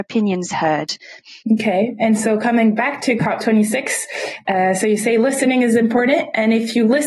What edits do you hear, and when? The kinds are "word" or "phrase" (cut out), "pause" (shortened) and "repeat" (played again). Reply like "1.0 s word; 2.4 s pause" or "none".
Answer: 1.4 s pause